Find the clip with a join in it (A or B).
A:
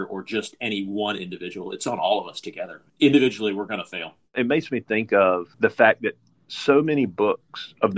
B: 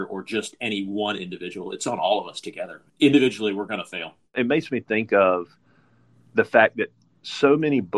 A